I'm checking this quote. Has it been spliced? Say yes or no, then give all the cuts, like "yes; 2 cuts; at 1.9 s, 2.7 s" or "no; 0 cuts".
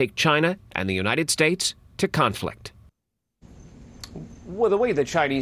no; 0 cuts